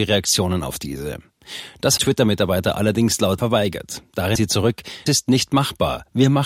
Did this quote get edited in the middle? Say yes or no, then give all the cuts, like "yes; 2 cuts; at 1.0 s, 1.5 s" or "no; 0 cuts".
yes; 4 cuts; at 2.0 s, 3.4 s, 4.4 s, 5.1 s